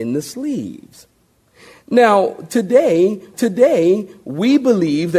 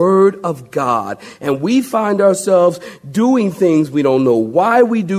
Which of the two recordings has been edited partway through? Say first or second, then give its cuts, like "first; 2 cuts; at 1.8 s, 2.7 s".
first; 1 cut; at 3.3 s